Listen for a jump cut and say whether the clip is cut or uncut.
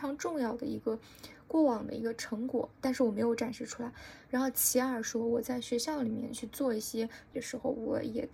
cut